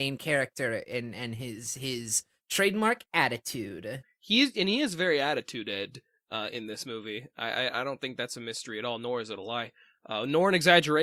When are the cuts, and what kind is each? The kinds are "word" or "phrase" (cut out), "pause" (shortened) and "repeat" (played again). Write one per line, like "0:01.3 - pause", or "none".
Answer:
none